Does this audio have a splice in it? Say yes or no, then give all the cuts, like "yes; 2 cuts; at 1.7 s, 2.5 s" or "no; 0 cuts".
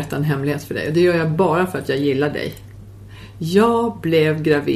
no; 0 cuts